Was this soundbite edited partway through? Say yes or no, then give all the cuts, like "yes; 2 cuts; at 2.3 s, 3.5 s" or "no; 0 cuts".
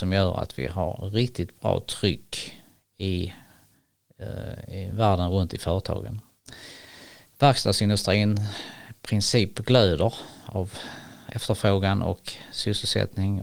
no; 0 cuts